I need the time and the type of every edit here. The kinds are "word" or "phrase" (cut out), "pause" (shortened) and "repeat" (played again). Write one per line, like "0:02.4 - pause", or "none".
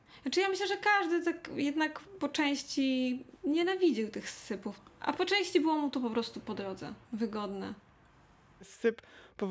0:07.0 - pause